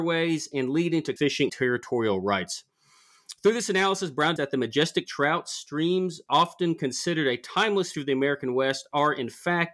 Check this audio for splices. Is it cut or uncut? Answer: cut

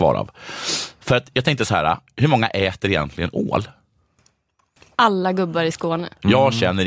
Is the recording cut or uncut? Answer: uncut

